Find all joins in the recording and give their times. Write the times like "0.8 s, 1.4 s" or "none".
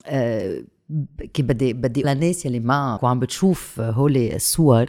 2.0 s, 3.0 s